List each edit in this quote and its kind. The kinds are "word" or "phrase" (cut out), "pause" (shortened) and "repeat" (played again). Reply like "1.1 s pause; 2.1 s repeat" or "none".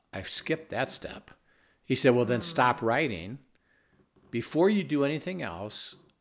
none